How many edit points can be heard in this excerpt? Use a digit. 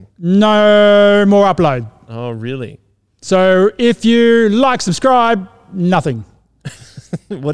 0